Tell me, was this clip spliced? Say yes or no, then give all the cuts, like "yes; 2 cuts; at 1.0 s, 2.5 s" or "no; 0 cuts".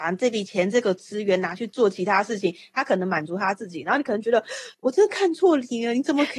yes; 1 cut; at 4.7 s